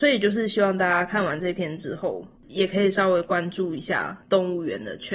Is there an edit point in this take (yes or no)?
yes